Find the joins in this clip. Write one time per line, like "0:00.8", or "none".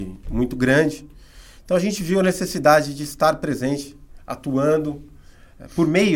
none

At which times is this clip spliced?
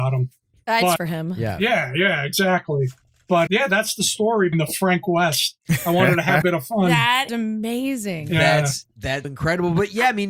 0:01.0
0:03.5
0:04.5
0:06.4
0:07.3
0:09.2

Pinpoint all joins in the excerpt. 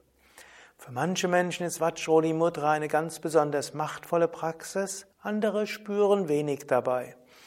0:05.1

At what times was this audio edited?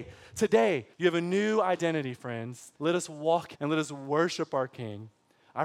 0:00.9
0:02.7
0:03.5

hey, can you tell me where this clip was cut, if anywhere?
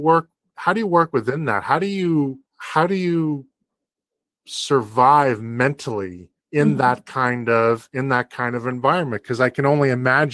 0:02.5
0:06.4

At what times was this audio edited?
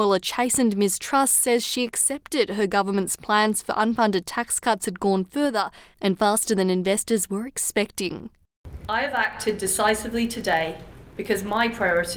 none

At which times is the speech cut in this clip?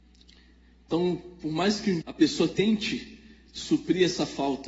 0:02.0

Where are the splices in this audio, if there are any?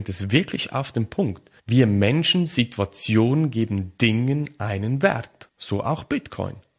0:01.6

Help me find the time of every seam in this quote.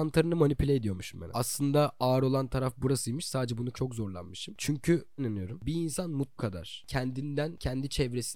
0:01.3
0:03.7
0:05.2
0:06.4

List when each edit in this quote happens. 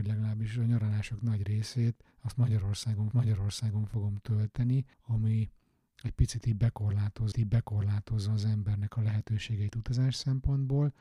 0:02.1
0:03.1
0:04.9
0:07.3

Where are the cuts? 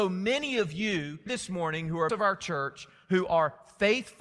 0:01.3
0:02.1

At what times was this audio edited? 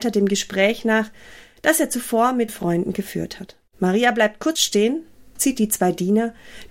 0:02.5
0:03.7
0:04.6
0:05.4

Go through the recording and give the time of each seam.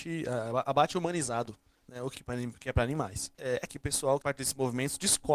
0:02.1
0:03.7
0:04.2

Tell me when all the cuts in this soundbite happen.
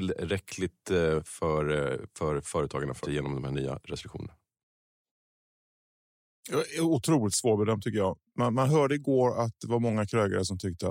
0:03.0

